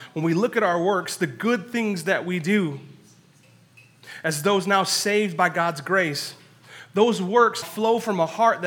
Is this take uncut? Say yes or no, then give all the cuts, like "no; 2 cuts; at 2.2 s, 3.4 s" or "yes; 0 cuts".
no; 1 cut; at 7.6 s